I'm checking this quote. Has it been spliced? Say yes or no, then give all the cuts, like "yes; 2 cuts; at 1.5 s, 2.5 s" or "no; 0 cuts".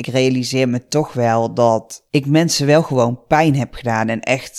no; 0 cuts